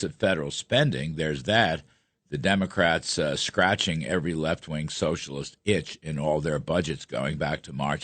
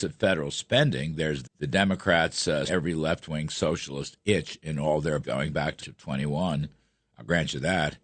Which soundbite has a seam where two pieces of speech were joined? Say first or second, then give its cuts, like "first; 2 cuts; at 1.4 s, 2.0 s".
second; 4 cuts; at 1.4 s, 2.7 s, 5.2 s, 5.8 s